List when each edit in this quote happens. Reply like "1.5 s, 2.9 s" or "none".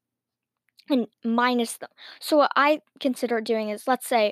1.1 s